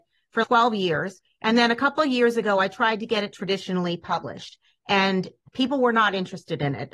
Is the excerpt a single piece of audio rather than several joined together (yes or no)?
yes